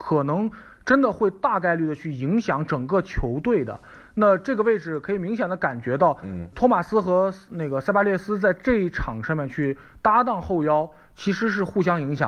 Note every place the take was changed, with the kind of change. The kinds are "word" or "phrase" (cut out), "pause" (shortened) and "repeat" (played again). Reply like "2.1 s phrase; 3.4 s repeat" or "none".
6.5 s word